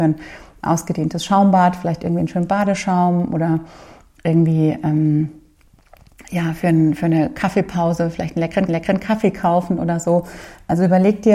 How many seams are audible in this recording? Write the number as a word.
one